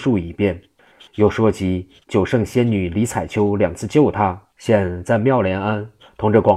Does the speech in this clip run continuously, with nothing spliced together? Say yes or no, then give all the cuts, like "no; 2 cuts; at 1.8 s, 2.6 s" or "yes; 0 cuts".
no; 1 cut; at 4.5 s